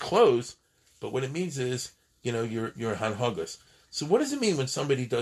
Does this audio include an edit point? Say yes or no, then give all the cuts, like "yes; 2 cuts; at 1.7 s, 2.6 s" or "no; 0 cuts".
no; 0 cuts